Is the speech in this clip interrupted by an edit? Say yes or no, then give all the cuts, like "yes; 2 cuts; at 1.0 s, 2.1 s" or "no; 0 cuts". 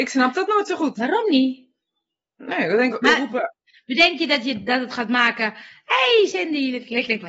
yes; 1 cut; at 2.9 s